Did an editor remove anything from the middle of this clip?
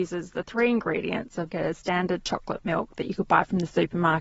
yes; 1 cut; at 1.5 s

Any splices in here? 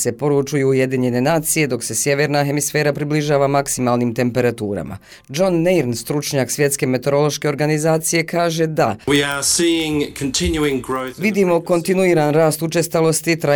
no; 0 cuts

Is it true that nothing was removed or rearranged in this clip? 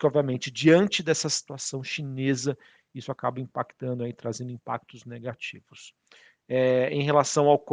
yes; 0 cuts

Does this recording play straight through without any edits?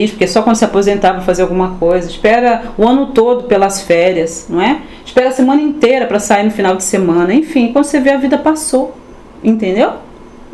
yes; 0 cuts

